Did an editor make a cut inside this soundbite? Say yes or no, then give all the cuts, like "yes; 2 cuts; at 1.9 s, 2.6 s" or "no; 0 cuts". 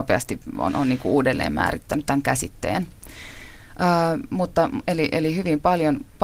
no; 0 cuts